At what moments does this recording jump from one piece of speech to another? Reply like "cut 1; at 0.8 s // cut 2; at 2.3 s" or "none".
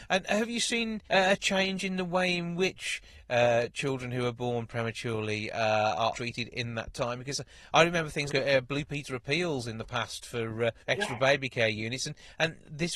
cut 1; at 1.1 s // cut 2; at 6.1 s // cut 3; at 8.3 s // cut 4; at 10.8 s